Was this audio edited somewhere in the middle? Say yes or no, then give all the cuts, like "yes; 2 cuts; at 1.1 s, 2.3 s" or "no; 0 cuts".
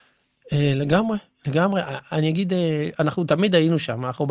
no; 0 cuts